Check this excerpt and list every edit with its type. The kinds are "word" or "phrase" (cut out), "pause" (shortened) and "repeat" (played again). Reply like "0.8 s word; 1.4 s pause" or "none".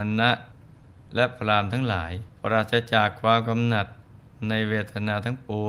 2.4 s pause